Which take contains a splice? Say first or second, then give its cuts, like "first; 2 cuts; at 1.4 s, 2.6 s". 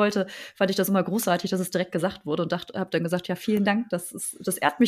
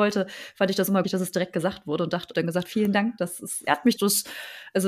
second; 5 cuts; at 1.0 s, 2.3 s, 2.6 s, 3.6 s, 4.0 s